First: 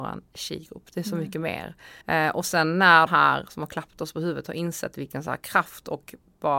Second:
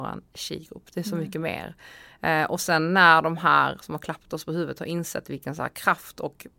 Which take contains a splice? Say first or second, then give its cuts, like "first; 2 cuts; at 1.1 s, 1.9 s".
first; 2 cuts; at 2.0 s, 3.1 s